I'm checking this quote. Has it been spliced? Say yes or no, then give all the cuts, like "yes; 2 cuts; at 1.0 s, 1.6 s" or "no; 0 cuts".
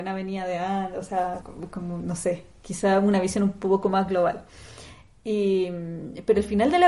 yes; 1 cut; at 1.4 s